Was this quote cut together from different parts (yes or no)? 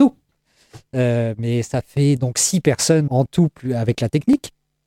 yes